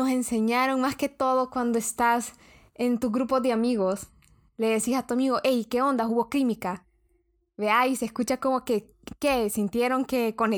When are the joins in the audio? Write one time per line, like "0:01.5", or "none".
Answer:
none